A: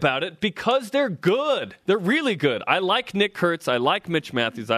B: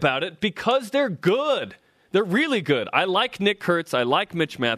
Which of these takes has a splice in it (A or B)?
A